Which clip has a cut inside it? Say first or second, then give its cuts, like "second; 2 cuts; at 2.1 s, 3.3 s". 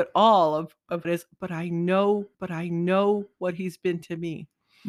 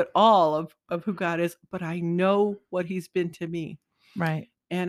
first; 2 cuts; at 1.0 s, 2.3 s